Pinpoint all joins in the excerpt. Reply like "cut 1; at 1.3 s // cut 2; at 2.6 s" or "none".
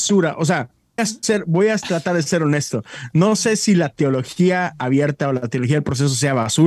cut 1; at 1.0 s